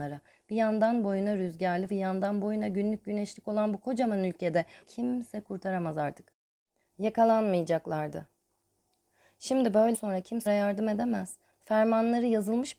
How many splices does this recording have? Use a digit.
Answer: 4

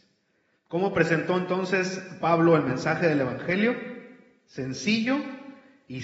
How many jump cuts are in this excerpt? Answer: 0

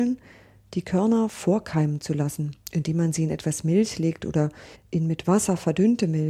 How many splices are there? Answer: 2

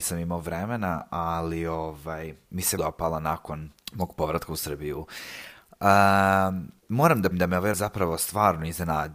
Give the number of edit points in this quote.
5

